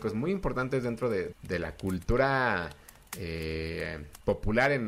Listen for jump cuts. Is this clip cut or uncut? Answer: cut